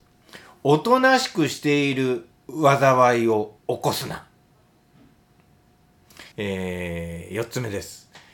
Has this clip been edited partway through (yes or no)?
yes